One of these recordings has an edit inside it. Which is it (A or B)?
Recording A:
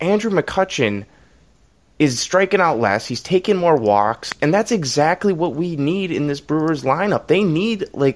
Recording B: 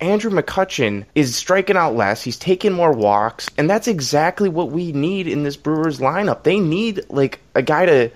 B